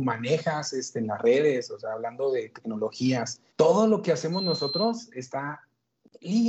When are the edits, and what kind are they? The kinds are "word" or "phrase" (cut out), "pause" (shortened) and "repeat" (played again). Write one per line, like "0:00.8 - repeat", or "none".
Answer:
0:03.5 - pause